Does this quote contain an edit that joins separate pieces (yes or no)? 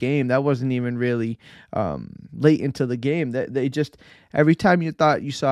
no